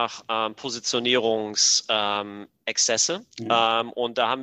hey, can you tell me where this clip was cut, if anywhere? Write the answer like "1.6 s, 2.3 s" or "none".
3.3 s